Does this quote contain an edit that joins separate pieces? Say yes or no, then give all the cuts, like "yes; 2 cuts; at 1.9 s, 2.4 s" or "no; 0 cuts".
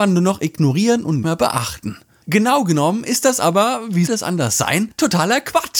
yes; 2 cuts; at 1.2 s, 4.1 s